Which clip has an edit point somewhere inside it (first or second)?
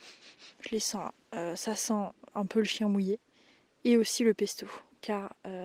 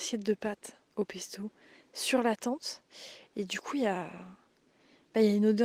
first